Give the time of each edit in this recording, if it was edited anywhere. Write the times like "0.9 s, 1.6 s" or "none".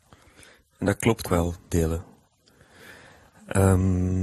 1.2 s, 1.7 s